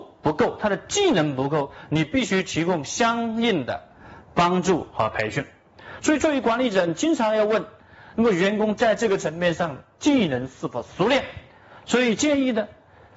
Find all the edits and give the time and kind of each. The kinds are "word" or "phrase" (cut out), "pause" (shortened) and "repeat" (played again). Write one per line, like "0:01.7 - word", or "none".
none